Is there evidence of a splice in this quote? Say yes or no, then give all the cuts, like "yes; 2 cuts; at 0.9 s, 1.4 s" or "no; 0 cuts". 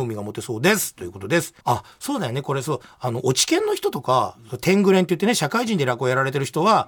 yes; 1 cut; at 1.6 s